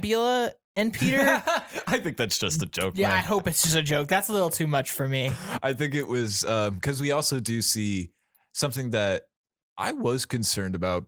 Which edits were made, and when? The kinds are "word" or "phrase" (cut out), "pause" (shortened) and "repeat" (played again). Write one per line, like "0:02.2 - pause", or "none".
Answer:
none